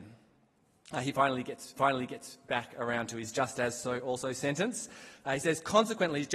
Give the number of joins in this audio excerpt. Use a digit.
1